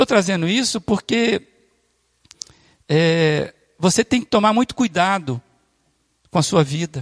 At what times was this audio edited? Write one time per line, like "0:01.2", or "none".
none